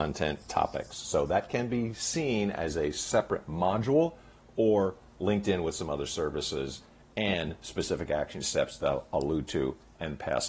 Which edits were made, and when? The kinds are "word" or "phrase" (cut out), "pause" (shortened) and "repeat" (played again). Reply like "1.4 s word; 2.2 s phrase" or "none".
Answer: none